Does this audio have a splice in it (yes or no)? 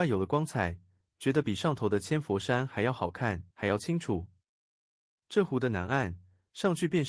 yes